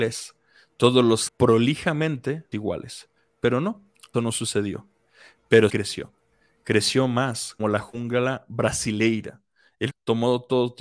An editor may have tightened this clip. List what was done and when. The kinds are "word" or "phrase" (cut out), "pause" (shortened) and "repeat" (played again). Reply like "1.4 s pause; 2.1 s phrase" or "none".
1.3 s word; 2.5 s word; 4.1 s word; 5.7 s word; 7.6 s word; 9.9 s word